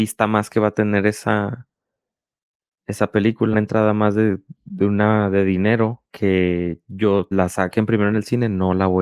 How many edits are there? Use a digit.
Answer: 4